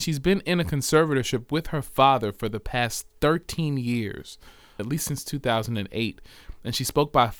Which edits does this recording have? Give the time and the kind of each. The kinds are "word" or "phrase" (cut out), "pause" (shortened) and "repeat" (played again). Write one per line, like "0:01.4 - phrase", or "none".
0:04.8 - word